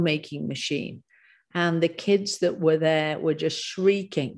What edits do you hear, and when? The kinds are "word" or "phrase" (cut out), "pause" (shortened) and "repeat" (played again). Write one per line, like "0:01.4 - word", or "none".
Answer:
none